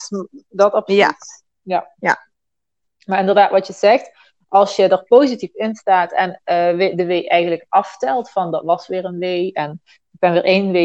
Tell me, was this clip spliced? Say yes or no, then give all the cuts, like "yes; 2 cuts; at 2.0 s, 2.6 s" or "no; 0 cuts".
no; 0 cuts